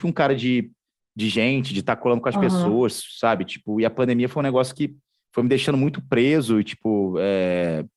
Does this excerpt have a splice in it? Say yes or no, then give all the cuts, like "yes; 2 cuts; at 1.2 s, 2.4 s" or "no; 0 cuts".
no; 0 cuts